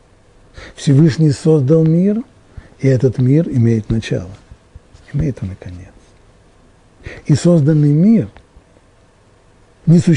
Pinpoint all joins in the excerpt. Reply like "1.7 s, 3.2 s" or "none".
none